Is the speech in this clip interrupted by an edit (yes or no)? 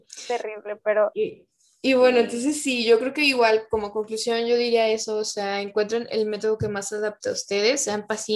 no